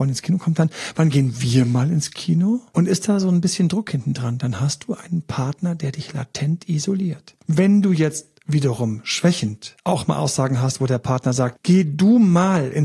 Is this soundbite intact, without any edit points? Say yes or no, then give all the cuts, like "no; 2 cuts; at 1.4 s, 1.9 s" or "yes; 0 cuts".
yes; 0 cuts